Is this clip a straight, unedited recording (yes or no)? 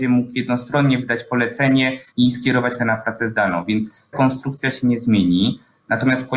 no